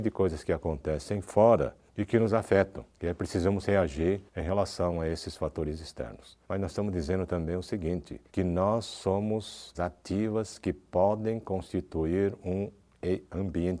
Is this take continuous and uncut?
no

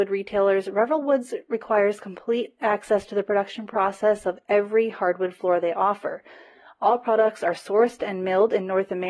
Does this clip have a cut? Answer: no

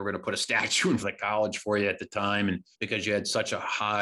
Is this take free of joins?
no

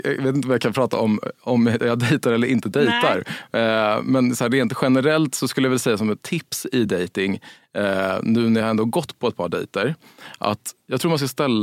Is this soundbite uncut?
yes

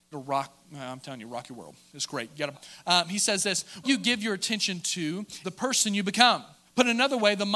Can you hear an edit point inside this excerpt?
yes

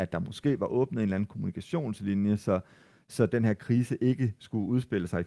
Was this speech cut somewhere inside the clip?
no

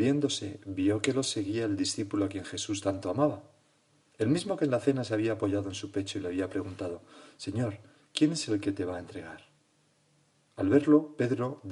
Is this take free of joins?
yes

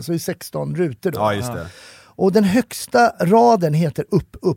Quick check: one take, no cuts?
yes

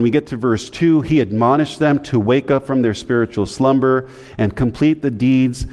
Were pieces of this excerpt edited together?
no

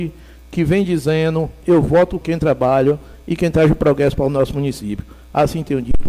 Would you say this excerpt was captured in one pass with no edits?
no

